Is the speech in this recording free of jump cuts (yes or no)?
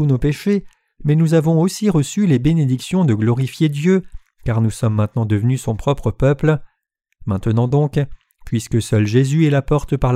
yes